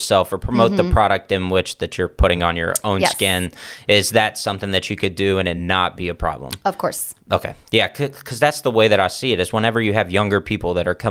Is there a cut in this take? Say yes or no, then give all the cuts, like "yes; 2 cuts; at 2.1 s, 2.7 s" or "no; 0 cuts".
no; 0 cuts